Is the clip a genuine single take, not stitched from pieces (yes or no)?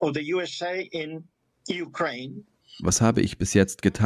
no